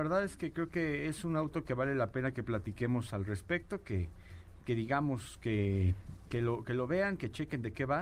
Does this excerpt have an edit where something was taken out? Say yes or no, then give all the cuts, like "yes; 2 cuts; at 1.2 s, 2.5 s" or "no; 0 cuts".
no; 0 cuts